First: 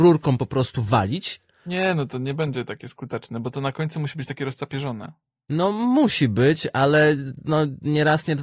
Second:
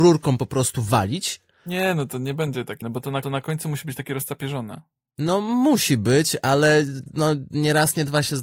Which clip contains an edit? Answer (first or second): second